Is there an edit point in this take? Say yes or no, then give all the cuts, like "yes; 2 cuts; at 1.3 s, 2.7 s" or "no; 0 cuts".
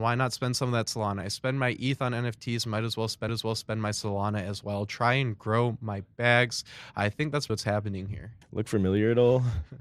yes; 3 cuts; at 3.3 s, 7.5 s, 8.4 s